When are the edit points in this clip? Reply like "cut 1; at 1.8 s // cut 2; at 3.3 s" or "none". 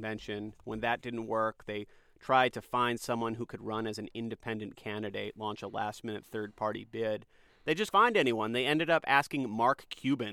cut 1; at 7.9 s